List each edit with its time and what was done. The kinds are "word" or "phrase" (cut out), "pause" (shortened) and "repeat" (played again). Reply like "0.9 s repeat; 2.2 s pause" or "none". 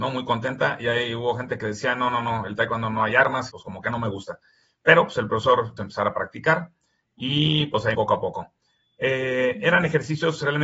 3.5 s word; 5.8 s phrase; 7.9 s word